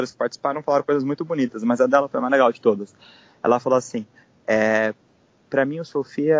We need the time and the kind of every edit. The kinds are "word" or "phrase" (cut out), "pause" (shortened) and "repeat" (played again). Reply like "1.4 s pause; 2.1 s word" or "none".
none

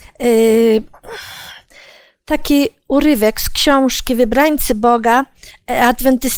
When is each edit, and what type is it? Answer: none

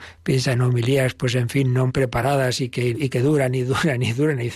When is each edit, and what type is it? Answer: 1.9 s word; 2.9 s word

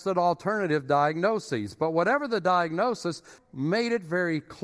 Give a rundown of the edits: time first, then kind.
3.4 s word

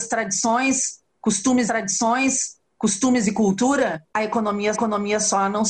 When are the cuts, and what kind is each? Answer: 1.6 s repeat; 4.1 s pause; 4.7 s repeat

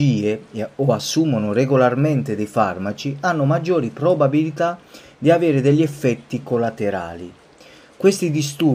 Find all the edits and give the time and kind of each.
none

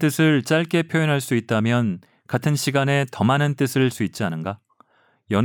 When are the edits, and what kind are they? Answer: 3.9 s word

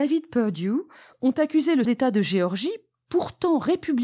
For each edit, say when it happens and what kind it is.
1.8 s word

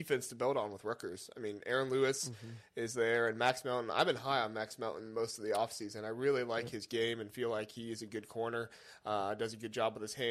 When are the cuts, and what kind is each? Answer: none

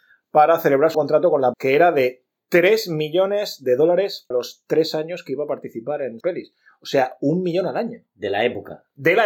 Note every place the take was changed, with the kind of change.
0.9 s word; 1.5 s word; 4.3 s word; 6.2 s word

